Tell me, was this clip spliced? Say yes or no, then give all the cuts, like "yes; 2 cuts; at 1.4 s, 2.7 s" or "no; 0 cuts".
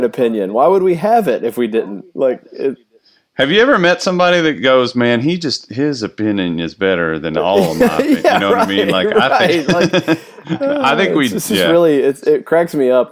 no; 0 cuts